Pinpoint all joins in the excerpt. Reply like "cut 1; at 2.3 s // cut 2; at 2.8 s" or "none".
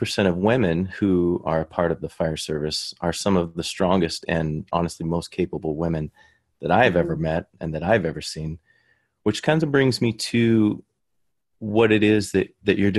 none